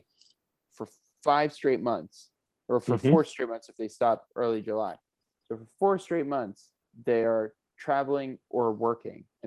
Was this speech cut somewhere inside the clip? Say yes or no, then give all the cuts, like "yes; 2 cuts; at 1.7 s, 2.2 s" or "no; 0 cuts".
no; 0 cuts